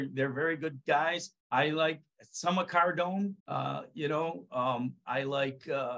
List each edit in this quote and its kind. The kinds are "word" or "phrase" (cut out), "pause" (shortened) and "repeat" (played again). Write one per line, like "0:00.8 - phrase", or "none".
0:01.4 - pause
0:03.4 - pause